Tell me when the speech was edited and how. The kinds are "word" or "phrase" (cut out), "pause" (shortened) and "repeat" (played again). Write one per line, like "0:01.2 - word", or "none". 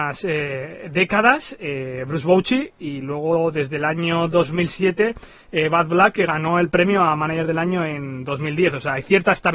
none